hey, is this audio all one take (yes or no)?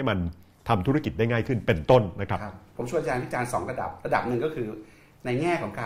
yes